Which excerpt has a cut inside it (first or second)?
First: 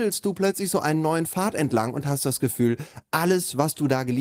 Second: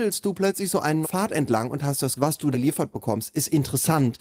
second